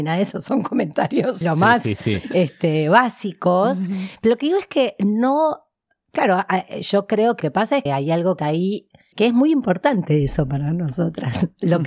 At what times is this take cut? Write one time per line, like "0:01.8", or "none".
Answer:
0:01.4
0:06.1
0:07.4
0:07.9
0:08.4
0:09.1